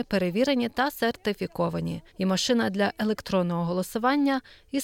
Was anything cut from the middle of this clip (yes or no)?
yes